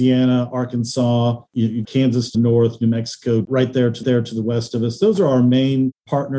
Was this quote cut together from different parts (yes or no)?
yes